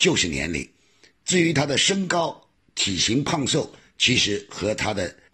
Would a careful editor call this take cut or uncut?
uncut